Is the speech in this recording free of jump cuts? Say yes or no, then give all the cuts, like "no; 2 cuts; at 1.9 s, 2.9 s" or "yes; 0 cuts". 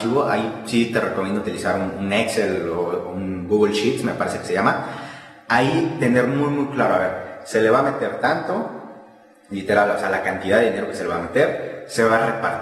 yes; 0 cuts